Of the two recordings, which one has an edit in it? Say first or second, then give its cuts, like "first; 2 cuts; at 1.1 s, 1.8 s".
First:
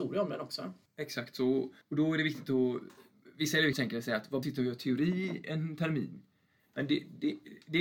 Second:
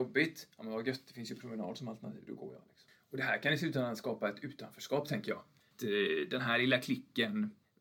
first; 3 cuts; at 1.8 s, 3.7 s, 4.4 s